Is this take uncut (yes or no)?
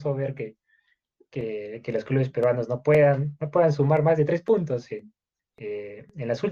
no